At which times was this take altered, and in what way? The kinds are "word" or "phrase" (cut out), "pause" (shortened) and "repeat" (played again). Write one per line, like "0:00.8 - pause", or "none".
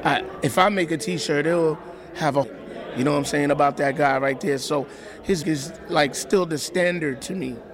0:02.4 - phrase
0:05.4 - word